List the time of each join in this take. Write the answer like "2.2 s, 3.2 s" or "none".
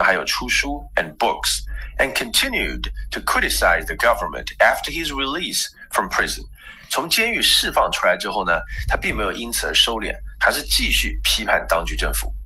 4.0 s

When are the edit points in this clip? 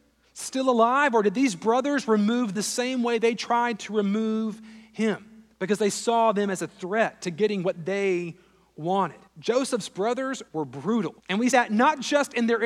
2.5 s, 5.5 s, 9.3 s, 10.5 s, 11.2 s, 11.5 s

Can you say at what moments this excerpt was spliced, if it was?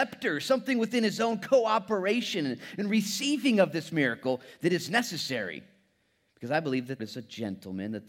7.0 s

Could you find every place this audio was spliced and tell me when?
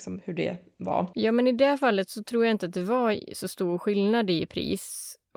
none

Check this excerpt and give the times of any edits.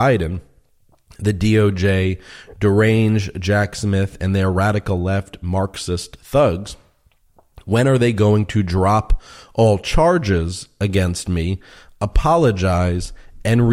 none

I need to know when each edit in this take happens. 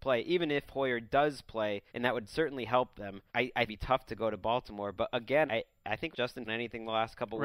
1.9 s, 3.3 s, 3.7 s, 5.5 s, 6.1 s, 6.5 s

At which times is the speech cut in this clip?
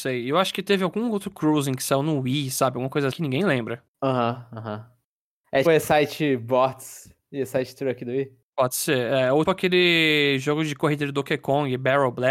3.1 s, 3.9 s, 5.6 s, 9.4 s

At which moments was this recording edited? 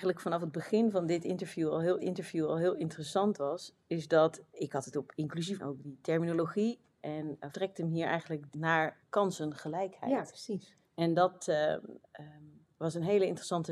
2.0 s, 4.9 s, 5.6 s, 7.5 s, 8.5 s, 9.0 s, 10.8 s

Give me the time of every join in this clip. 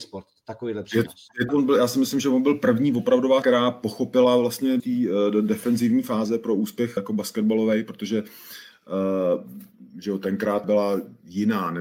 1.5 s, 3.4 s, 4.8 s, 7.0 s, 10.6 s

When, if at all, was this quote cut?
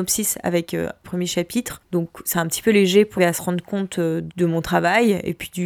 1.0 s, 3.2 s

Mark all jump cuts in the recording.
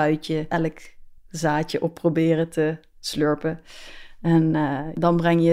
1.2 s

